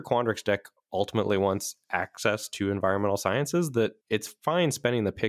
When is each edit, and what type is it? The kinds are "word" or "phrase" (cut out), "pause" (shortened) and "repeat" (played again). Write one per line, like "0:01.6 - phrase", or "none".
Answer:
0:04.0 - pause